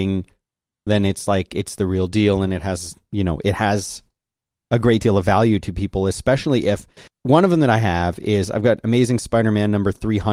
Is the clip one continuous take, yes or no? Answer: no